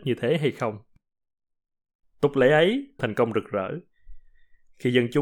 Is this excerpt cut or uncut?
cut